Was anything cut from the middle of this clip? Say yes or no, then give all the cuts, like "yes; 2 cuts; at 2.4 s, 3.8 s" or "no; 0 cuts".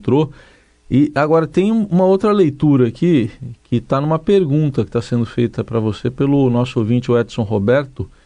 no; 0 cuts